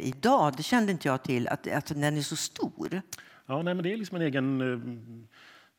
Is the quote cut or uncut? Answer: uncut